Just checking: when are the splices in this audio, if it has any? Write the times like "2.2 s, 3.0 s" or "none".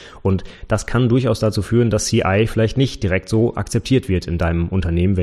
none